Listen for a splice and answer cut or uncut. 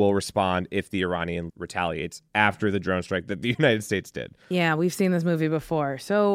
cut